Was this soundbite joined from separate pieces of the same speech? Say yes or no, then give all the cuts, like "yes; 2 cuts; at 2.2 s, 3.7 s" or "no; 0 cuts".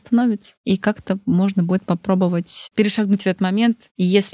no; 0 cuts